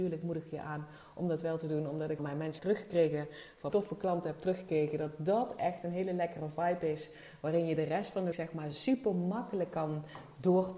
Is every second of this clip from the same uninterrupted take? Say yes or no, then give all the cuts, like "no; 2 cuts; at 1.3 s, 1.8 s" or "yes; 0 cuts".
no; 4 cuts; at 2.2 s, 2.6 s, 3.7 s, 8.3 s